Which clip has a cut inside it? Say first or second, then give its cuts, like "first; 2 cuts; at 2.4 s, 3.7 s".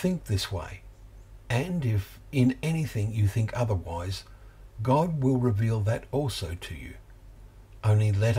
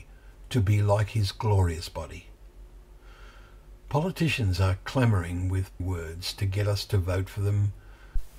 second; 1 cut; at 5.8 s